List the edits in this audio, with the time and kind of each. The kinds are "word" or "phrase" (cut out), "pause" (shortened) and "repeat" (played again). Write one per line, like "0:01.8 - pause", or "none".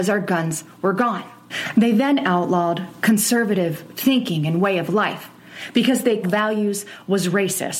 0:06.2 - phrase